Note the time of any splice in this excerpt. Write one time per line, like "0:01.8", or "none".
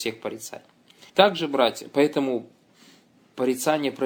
0:01.1